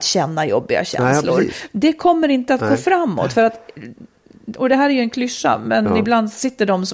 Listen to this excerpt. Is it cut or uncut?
uncut